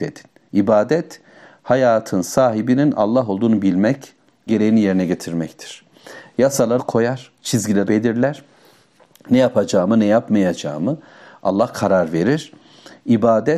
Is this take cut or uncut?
cut